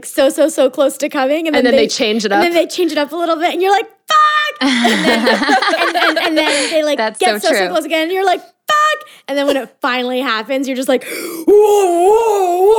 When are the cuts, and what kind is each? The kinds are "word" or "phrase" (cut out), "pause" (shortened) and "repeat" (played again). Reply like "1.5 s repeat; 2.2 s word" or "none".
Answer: none

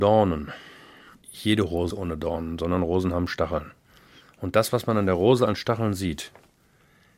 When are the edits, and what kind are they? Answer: 1.9 s word

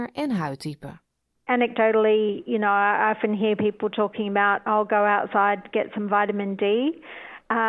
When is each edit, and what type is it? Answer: none

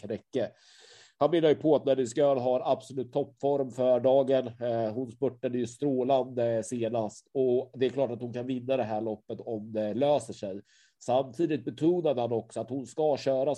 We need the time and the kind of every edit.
none

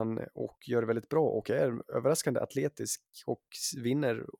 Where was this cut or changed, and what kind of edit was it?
none

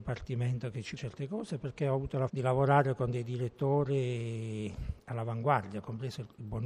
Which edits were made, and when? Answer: 1.0 s word; 2.3 s word

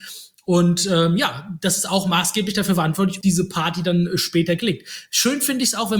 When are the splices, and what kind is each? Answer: 3.2 s word

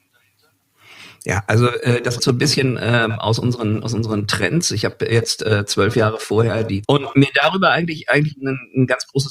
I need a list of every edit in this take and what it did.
2.2 s word; 6.8 s phrase

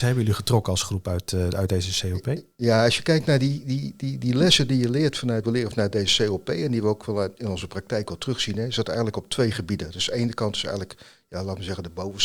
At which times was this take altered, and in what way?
5.4 s phrase

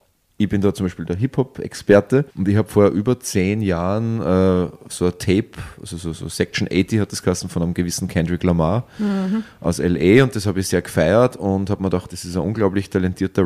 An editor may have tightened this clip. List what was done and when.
2.3 s pause

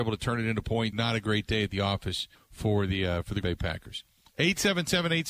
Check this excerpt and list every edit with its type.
0.9 s word; 2.4 s pause; 3.4 s word

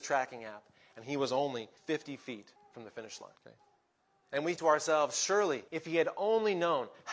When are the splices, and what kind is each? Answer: 1.8 s pause; 2.6 s pause; 3.4 s pause; 4.6 s word; 5.7 s pause

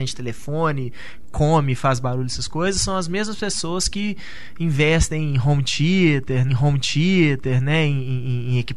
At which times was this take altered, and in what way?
6.5 s repeat

